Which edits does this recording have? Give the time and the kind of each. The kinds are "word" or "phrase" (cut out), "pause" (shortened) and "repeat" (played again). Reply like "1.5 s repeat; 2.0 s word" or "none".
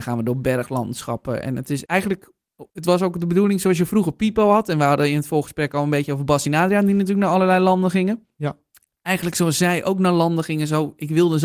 1.9 s word; 2.7 s pause